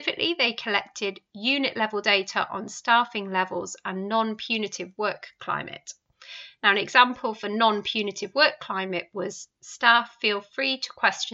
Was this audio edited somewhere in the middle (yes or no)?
no